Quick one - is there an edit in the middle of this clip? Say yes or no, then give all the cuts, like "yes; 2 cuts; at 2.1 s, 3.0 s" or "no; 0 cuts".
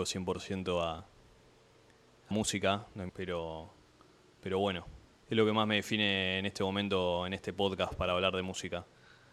yes; 3 cuts; at 2.3 s, 3.1 s, 5.2 s